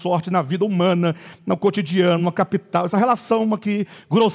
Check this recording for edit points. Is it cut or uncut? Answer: uncut